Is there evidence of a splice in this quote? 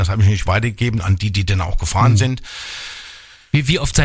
no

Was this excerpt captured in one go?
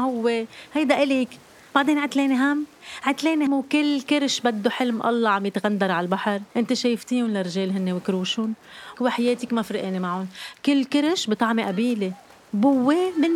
no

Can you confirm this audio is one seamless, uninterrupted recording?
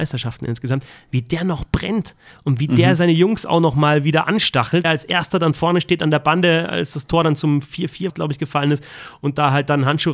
no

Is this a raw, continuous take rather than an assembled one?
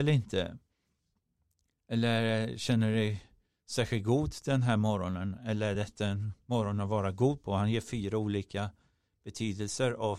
yes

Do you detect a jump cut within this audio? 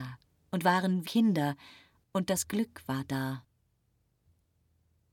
yes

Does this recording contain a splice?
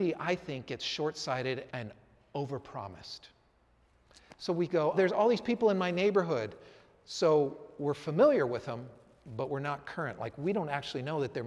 yes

